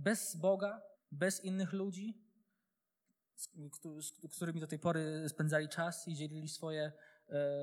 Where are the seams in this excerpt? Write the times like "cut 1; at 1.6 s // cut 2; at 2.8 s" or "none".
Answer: cut 1; at 0.9 s